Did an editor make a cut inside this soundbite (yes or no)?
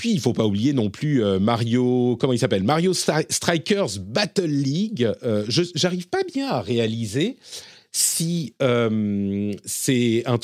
no